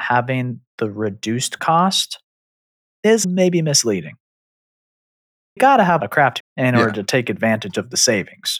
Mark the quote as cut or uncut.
cut